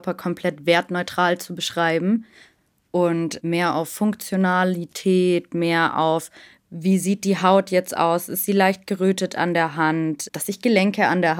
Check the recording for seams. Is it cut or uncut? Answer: cut